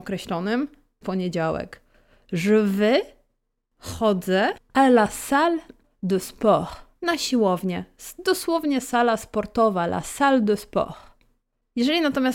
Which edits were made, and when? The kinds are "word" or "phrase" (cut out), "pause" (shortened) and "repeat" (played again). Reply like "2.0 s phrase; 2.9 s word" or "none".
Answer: 1.0 s phrase; 4.6 s pause; 7.0 s pause

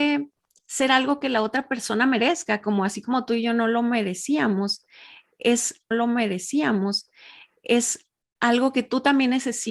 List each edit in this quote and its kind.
5.9 s repeat

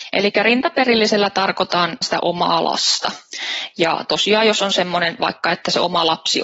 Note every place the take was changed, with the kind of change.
2.0 s word; 5.2 s word

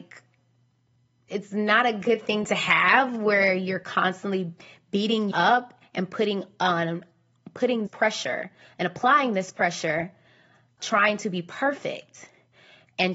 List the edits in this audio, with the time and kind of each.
1.3 s word; 5.3 s word; 7.9 s word; 10.8 s word

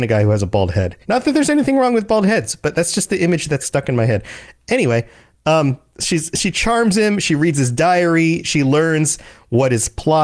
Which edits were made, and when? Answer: 1.0 s pause; 3.6 s word

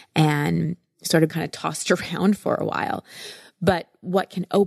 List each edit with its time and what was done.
1.3 s word

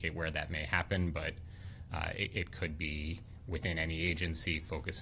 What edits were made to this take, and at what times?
none

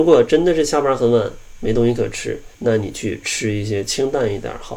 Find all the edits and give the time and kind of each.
2.5 s pause

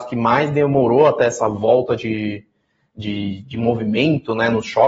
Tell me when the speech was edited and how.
none

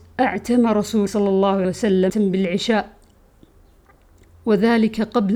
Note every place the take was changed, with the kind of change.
1.1 s word; 1.6 s word; 2.1 s word

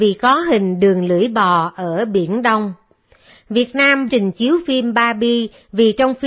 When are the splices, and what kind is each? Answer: 4.1 s phrase

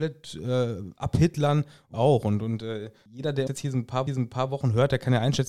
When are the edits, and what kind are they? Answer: 1.9 s phrase; 3.5 s word; 4.1 s repeat

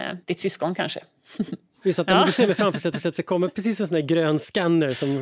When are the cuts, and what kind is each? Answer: 2.9 s repeat

